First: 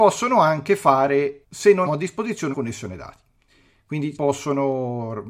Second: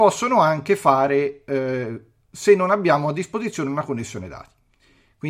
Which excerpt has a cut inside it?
first; 4 cuts; at 1.4 s, 1.9 s, 2.5 s, 4.2 s

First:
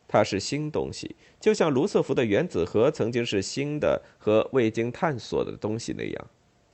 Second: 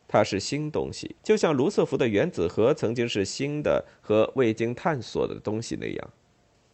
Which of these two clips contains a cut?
second; 1 cut; at 1.2 s

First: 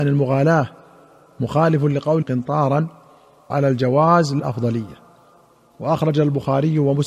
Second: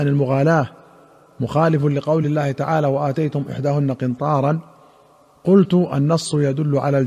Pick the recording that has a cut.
first; 3 cuts; at 2.2 s, 3.5 s, 4.4 s

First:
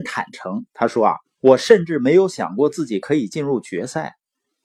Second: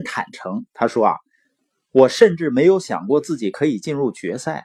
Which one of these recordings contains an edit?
first; 1 cut; at 1.2 s

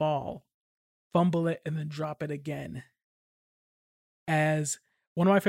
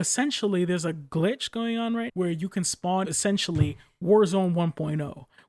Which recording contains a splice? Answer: second; 2 cuts; at 2.1 s, 3.0 s

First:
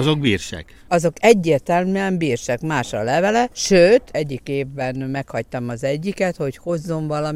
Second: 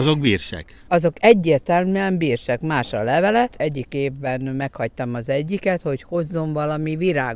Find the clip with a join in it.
second; 1 cut; at 3.5 s

